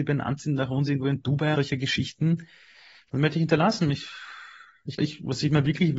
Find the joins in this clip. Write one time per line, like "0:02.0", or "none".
0:01.5
0:05.0